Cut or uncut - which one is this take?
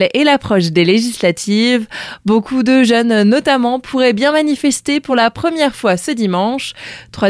uncut